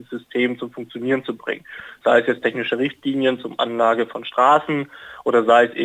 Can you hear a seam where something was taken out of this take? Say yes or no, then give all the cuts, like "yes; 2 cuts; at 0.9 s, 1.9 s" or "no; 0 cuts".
no; 0 cuts